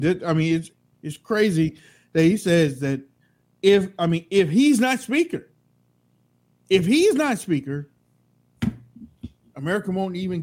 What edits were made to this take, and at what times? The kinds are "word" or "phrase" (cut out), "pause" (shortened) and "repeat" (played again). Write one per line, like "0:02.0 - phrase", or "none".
none